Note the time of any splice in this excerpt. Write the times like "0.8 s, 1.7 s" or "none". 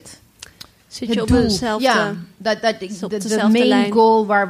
none